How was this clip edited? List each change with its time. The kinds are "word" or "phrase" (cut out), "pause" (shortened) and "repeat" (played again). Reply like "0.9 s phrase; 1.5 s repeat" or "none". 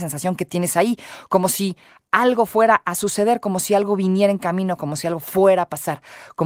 none

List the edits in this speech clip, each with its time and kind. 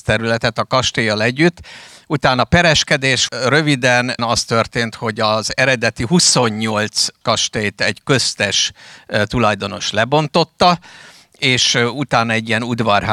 3.3 s word; 4.2 s word; 7.2 s word

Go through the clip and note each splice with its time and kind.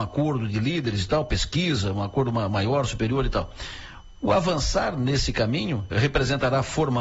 5.9 s word

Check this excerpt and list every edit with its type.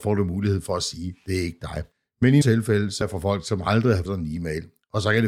2.4 s word; 3.0 s word; 4.1 s word

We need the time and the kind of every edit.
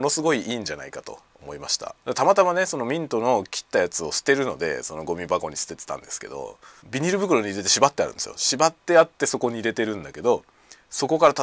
1.3 s pause; 2.0 s pause; 6.8 s pause

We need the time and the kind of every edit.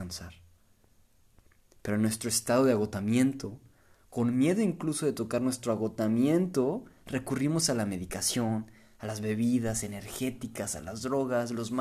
none

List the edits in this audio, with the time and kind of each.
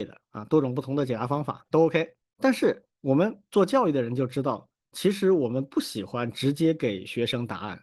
2.2 s pause; 2.9 s pause

